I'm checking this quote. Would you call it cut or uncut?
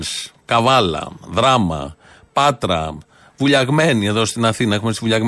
uncut